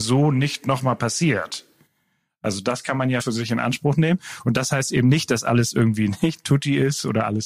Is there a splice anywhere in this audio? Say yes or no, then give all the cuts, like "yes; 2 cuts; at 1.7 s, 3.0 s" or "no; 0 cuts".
yes; 1 cut; at 3.2 s